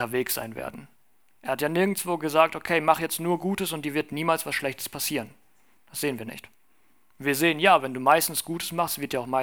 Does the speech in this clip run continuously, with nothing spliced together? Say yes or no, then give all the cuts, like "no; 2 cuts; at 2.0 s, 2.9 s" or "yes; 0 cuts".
yes; 0 cuts